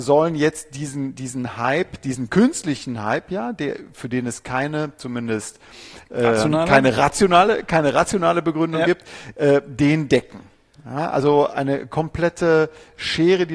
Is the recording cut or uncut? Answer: uncut